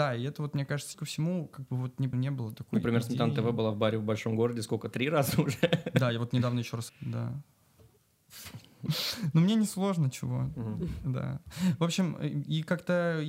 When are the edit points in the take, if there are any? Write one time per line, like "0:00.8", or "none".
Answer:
0:00.9
0:02.1
0:06.9